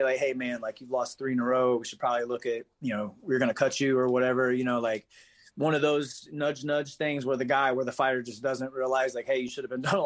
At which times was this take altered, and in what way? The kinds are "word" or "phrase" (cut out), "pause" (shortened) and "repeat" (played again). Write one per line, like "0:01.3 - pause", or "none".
none